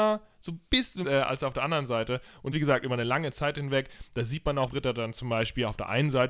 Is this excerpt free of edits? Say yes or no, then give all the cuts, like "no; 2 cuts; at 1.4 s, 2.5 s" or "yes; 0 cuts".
no; 3 cuts; at 1.0 s, 2.5 s, 4.7 s